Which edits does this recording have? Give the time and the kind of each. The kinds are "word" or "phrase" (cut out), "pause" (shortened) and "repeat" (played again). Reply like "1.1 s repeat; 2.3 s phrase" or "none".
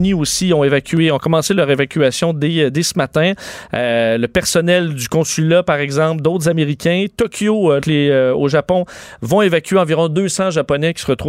7.8 s word